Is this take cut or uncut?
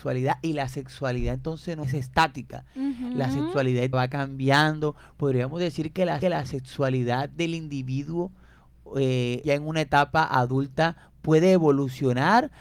cut